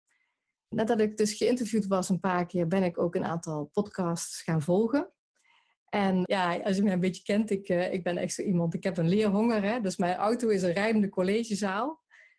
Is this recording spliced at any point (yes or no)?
no